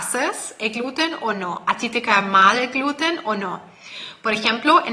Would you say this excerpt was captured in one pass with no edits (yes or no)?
yes